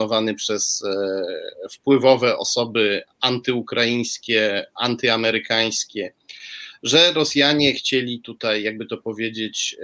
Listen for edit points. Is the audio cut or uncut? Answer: uncut